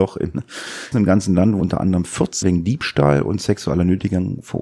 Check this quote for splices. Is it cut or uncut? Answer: cut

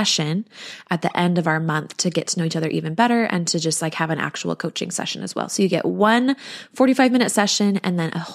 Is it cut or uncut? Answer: uncut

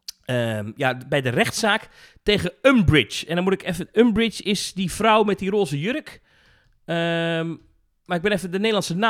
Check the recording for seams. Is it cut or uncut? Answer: uncut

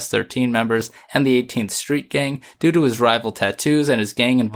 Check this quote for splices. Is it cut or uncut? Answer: uncut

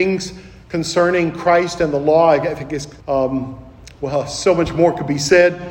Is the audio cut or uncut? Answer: cut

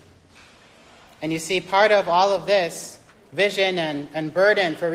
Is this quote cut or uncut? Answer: cut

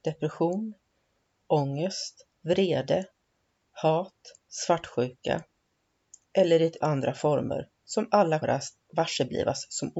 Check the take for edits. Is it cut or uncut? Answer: cut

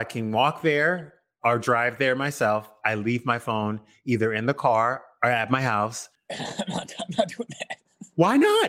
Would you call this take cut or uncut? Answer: uncut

